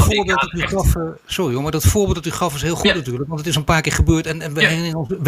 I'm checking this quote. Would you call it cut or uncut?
uncut